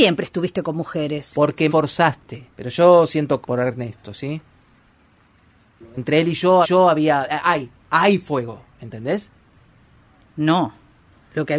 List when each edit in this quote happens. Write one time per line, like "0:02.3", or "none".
0:01.7
0:02.5
0:03.4
0:06.6
0:08.7